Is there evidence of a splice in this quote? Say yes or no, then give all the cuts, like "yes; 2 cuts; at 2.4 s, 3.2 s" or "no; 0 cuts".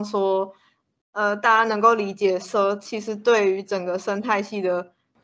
no; 0 cuts